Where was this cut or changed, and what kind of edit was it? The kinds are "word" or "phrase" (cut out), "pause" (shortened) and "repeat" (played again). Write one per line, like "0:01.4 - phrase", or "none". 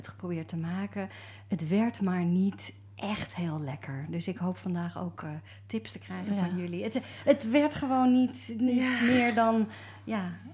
none